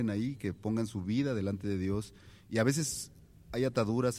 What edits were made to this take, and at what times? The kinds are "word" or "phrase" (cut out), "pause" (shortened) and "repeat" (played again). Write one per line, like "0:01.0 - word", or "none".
none